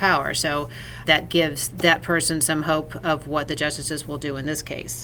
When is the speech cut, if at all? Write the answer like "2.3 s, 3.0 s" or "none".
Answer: 1.1 s, 1.7 s, 3.5 s